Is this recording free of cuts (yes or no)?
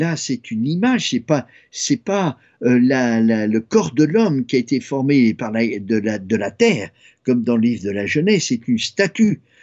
yes